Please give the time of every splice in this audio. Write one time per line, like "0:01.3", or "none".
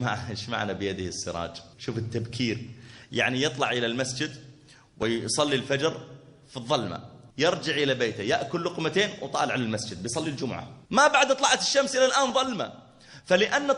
0:01.7
0:07.3
0:10.9

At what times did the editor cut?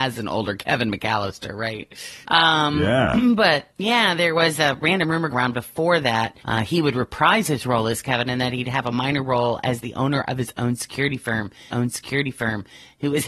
0:02.2
0:03.7
0:05.3
0:06.4
0:11.7

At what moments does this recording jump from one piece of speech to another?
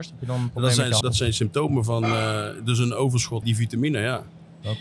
0:01.0
0:03.4

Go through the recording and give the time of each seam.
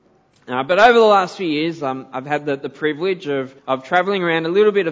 0:03.6

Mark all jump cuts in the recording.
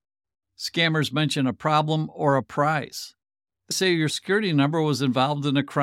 0:03.7
0:04.1

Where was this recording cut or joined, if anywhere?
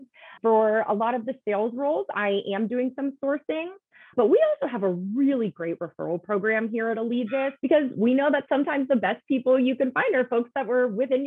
0:07.6

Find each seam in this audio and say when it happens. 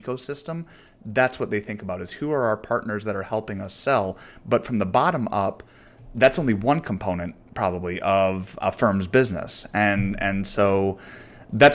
0:08.6

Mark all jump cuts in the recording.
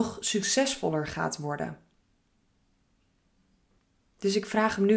none

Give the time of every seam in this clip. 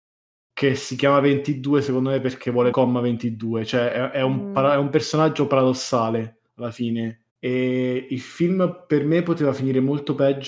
0:02.7
0:06.5
0:07.3

